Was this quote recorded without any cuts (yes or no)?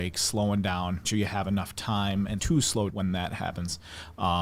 no